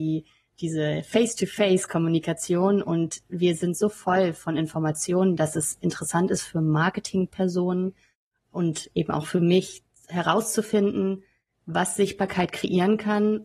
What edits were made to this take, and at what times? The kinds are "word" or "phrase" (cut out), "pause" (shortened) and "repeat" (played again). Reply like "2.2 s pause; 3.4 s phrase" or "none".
none